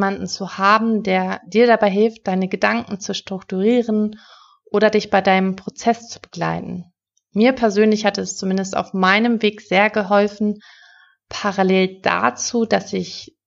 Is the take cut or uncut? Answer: uncut